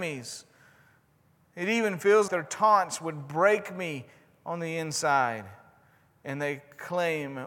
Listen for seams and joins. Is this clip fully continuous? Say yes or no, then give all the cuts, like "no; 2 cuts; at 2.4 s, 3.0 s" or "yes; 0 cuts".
no; 1 cut; at 2.3 s